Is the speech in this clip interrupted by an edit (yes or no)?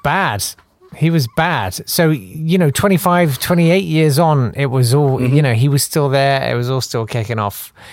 no